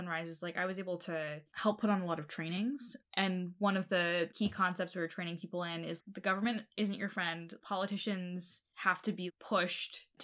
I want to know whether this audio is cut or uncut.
cut